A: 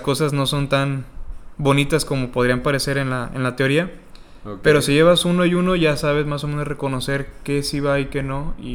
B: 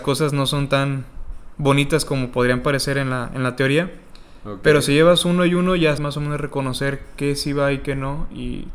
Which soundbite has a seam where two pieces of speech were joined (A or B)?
B